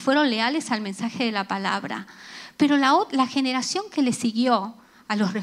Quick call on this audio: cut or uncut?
uncut